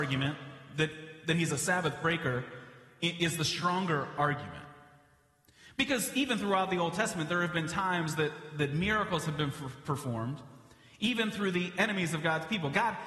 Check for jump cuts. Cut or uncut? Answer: uncut